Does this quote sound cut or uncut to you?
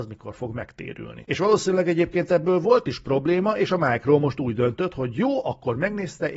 uncut